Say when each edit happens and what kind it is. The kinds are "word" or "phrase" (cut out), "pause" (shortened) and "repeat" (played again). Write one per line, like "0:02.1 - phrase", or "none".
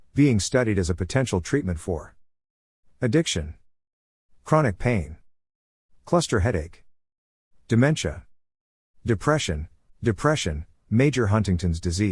0:09.9 - repeat